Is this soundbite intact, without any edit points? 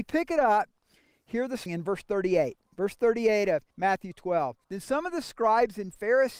no; 3 cuts; at 1.7 s, 3.7 s, 4.6 s

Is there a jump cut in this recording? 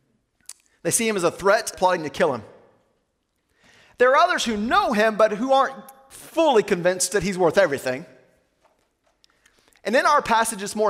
yes; 1 cut; at 1.7 s

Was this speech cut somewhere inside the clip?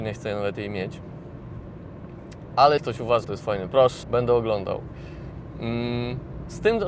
yes; 4 cuts; at 2.8 s, 3.2 s, 3.7 s, 4.0 s

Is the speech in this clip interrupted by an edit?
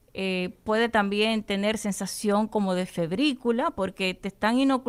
no; 0 cuts

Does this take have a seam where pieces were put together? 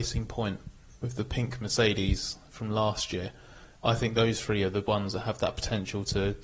no; 0 cuts

